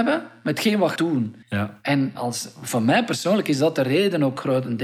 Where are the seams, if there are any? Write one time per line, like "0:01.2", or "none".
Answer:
0:01.0
0:01.4
0:02.1